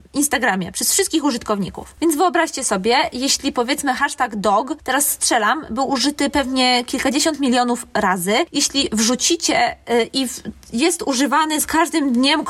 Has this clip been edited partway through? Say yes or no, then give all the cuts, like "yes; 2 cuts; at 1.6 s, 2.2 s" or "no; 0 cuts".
no; 0 cuts